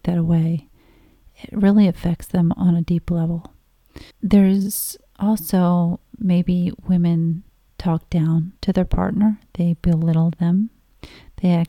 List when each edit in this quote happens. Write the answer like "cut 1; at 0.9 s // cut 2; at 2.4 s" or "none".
cut 1; at 4.1 s // cut 2; at 7.5 s // cut 3; at 8.6 s